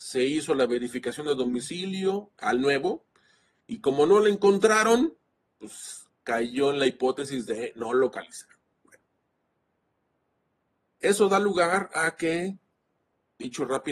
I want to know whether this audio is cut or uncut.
uncut